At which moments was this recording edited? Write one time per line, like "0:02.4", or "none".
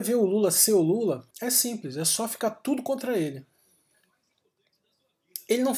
0:01.3